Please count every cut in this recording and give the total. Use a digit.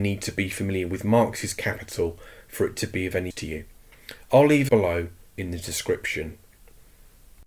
2